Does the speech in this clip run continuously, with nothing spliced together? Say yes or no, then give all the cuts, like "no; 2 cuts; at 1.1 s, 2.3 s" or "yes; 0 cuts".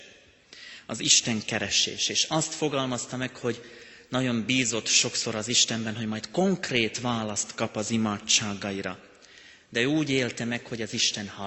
yes; 0 cuts